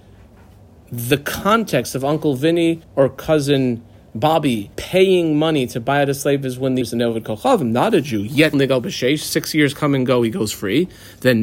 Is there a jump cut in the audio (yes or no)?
yes